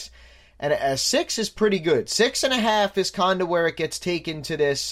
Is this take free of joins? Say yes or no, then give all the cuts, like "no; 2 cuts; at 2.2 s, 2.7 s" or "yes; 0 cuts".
yes; 0 cuts